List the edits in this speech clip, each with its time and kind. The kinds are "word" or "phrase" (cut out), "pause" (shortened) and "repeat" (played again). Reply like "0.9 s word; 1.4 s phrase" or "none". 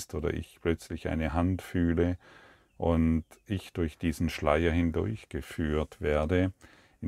none